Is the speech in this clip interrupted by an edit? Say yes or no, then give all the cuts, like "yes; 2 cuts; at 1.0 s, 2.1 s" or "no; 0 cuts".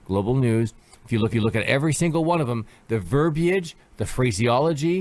yes; 1 cut; at 1.3 s